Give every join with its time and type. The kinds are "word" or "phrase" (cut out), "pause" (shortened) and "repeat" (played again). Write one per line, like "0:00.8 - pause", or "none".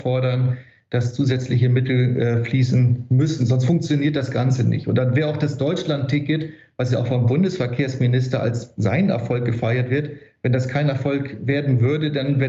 none

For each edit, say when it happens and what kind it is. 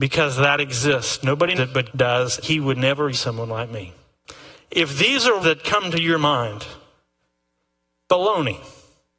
0:01.6 - word
0:01.9 - word
0:02.4 - word
0:03.1 - word
0:05.4 - word

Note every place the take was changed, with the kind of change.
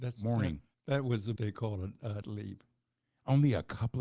0:01.4 - word
0:02.2 - word

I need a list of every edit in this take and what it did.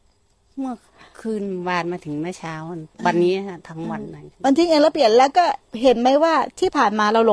0:02.9 - pause

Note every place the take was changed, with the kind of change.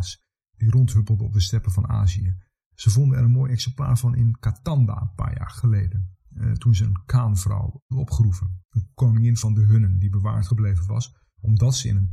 none

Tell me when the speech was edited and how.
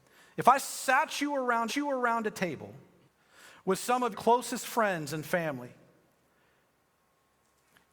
0:01.7 - repeat
0:03.1 - pause
0:04.1 - word

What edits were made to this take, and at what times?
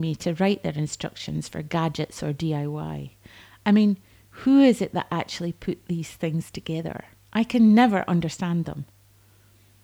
none

